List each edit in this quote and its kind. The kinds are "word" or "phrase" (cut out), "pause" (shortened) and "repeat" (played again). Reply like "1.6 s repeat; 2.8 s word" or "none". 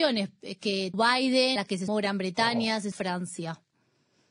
0.9 s word; 1.6 s word; 1.9 s word; 2.9 s word